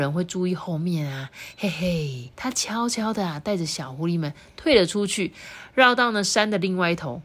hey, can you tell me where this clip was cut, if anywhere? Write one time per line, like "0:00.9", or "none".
0:02.3